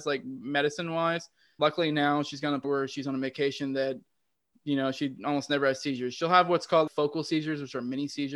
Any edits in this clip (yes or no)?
yes